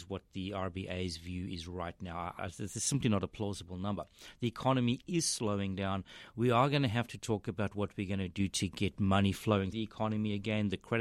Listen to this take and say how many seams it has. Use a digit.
2